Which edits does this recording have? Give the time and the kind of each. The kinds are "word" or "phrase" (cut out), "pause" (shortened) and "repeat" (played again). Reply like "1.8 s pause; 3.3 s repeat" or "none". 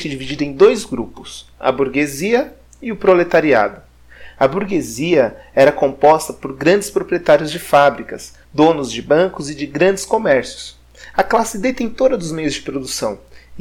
8.4 s pause